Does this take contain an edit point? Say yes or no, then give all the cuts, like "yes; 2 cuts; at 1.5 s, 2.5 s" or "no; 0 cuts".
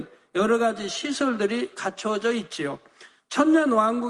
no; 0 cuts